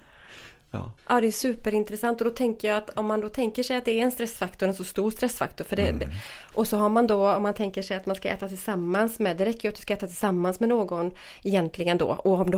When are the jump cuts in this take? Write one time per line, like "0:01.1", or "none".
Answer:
0:01.0